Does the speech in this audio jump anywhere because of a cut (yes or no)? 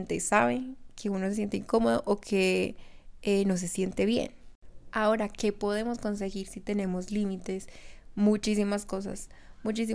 no